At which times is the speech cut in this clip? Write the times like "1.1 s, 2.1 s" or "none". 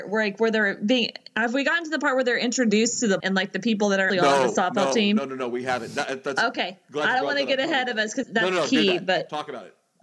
3.2 s, 4.1 s, 8.2 s